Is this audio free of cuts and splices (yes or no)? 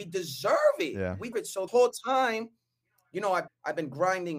no